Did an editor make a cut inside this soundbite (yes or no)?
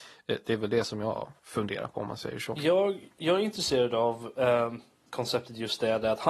no